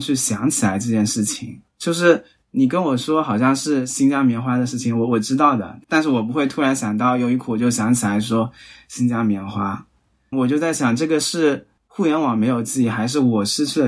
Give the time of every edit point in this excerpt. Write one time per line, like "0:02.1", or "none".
0:01.7
0:10.3
0:11.8